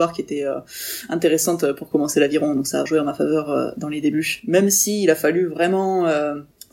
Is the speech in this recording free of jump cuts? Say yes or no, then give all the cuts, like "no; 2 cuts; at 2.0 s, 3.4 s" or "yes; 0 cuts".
no; 1 cut; at 2.9 s